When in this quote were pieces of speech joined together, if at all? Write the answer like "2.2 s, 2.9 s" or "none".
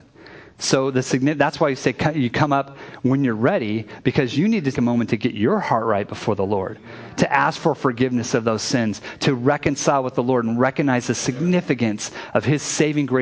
4.7 s